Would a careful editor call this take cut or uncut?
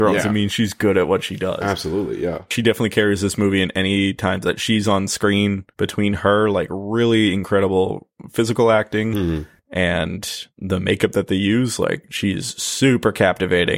cut